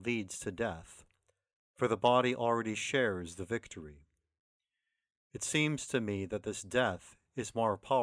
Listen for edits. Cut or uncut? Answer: uncut